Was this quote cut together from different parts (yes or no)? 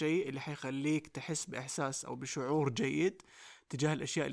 no